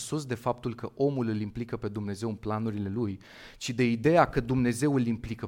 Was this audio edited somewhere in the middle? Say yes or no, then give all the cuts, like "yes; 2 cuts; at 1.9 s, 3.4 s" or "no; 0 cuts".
no; 0 cuts